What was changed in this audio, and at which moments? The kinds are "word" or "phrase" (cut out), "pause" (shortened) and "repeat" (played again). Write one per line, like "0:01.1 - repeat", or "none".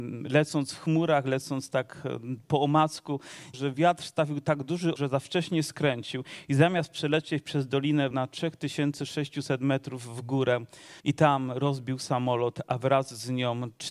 0:03.5 - phrase
0:05.0 - word
0:08.1 - word
0:11.0 - pause